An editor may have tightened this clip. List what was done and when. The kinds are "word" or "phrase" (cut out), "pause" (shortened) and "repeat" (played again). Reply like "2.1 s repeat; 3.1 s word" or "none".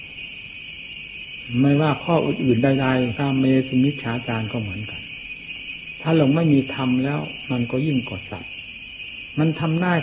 3.2 s word